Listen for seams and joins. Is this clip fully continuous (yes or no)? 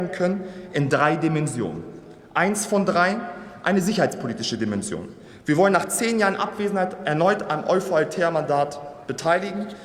yes